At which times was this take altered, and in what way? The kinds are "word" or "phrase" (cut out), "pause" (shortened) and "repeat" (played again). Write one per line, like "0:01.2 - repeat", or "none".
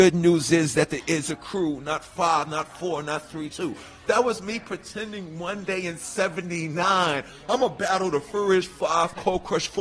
0:03.5 - word